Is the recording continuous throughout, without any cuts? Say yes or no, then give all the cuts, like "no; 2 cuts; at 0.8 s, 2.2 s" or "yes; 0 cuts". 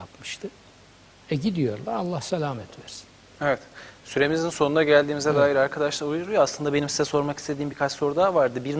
yes; 0 cuts